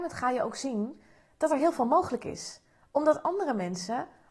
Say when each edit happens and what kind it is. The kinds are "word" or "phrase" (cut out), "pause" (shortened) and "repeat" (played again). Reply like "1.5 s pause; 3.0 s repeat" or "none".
none